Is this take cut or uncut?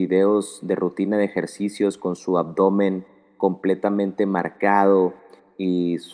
uncut